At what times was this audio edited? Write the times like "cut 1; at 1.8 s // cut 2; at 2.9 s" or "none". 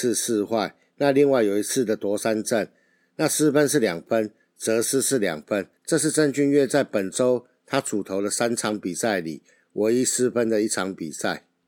cut 1; at 5.8 s